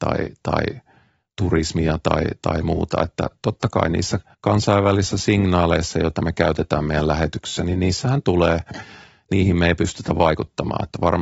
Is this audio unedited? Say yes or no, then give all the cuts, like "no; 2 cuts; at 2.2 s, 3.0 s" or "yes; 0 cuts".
no; 1 cut; at 4.3 s